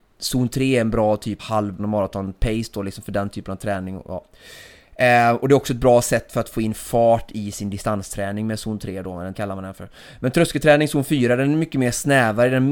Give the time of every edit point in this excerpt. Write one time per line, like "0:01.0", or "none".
0:01.4
0:01.8
0:09.3